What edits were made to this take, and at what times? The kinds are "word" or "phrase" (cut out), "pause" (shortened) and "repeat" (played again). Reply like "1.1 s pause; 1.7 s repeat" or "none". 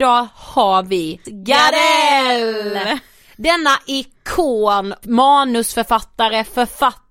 1.2 s word; 5.0 s word